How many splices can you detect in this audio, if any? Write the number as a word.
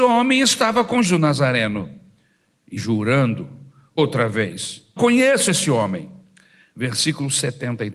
four